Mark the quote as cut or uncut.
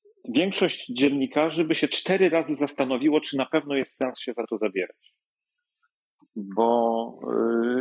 uncut